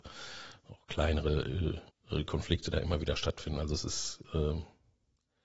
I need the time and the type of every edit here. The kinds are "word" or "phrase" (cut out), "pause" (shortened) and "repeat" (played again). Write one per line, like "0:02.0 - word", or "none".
0:01.9 - pause